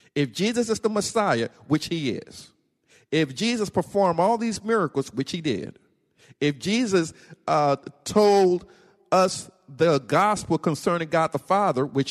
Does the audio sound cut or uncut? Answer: uncut